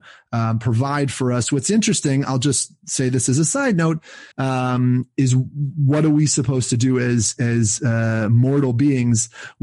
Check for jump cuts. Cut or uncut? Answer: cut